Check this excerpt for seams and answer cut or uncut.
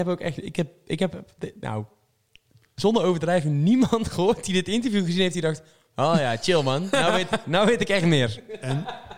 uncut